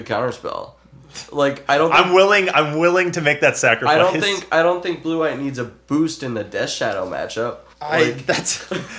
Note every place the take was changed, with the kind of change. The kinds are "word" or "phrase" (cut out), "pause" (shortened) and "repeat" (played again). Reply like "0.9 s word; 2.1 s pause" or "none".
7.7 s pause